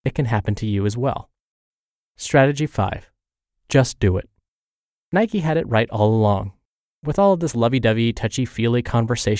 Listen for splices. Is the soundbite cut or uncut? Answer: uncut